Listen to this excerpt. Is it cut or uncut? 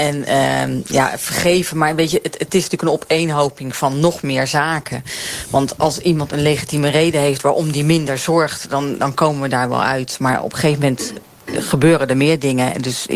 uncut